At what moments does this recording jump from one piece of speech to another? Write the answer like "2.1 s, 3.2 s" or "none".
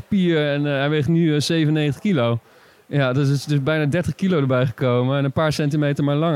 none